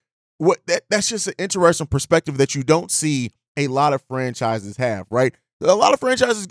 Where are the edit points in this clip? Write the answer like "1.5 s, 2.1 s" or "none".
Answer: none

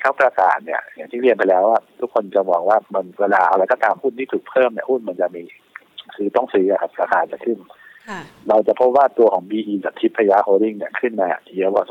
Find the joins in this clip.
9.8 s

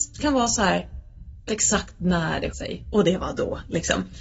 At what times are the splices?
1.5 s, 2.5 s

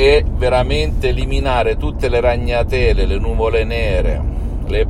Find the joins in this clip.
none

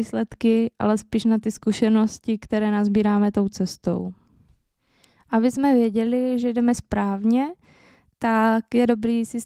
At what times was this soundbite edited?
none

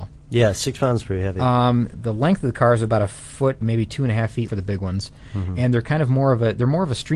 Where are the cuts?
1.9 s, 3.6 s, 4.5 s

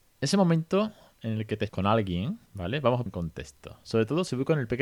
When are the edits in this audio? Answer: 1.7 s, 2.5 s, 3.1 s

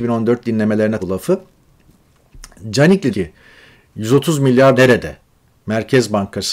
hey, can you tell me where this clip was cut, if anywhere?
1.0 s, 3.1 s, 4.8 s

